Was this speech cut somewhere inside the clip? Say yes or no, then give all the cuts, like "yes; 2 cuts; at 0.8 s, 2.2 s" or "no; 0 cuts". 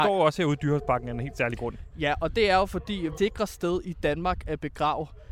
yes; 1 cut; at 3.2 s